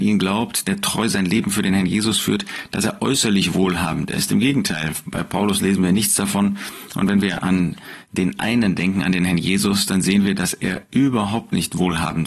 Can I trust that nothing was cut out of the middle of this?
yes; 0 cuts

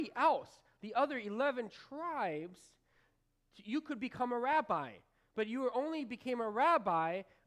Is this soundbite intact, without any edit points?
yes; 0 cuts

